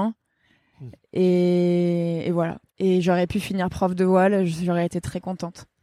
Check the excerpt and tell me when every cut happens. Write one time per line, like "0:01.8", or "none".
0:02.7